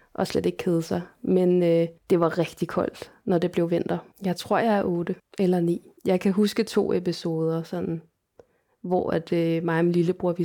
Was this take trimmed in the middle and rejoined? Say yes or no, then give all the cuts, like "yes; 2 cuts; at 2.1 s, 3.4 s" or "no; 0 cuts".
yes; 4 cuts; at 2.0 s, 4.1 s, 5.2 s, 6.0 s